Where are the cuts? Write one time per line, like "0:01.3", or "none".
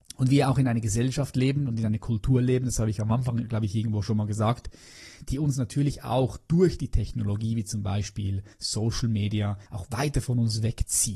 0:08.5
0:09.7